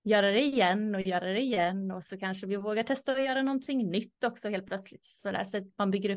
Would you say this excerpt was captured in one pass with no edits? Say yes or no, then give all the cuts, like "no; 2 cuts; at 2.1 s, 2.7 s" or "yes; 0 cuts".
yes; 0 cuts